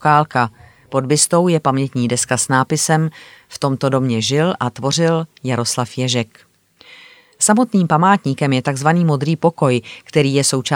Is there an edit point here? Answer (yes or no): no